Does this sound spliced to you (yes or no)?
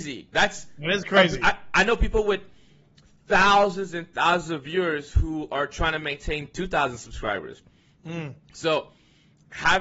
no